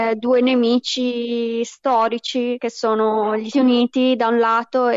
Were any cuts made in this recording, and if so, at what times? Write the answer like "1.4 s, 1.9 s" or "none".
3.5 s